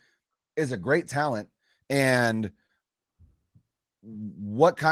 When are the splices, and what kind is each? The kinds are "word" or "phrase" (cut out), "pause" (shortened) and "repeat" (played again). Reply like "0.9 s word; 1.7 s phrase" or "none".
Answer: none